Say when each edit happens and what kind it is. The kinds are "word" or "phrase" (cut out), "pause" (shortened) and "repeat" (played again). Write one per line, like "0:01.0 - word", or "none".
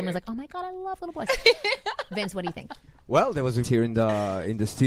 0:03.6 - word